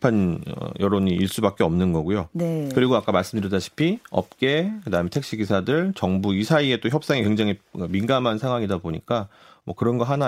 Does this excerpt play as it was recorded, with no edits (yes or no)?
yes